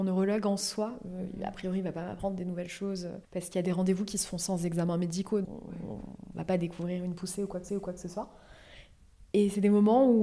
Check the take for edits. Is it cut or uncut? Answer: cut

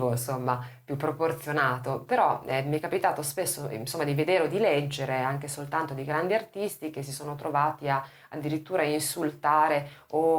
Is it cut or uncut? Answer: uncut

